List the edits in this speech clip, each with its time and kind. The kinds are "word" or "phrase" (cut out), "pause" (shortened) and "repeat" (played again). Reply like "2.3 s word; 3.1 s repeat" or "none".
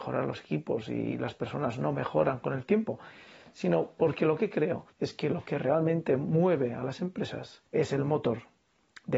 4.9 s pause; 7.7 s pause